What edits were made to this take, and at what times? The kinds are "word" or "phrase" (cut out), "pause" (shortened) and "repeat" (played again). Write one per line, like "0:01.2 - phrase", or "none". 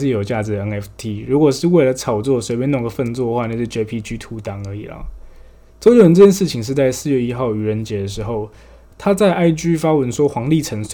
none